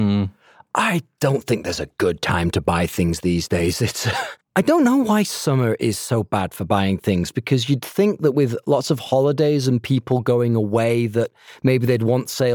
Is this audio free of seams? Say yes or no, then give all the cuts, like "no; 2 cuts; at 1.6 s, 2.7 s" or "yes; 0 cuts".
no; 1 cut; at 4.4 s